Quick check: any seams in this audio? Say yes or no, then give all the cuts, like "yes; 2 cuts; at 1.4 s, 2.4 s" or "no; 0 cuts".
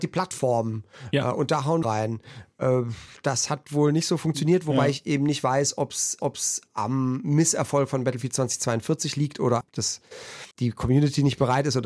yes; 4 cuts; at 1.8 s, 6.2 s, 9.6 s, 10.5 s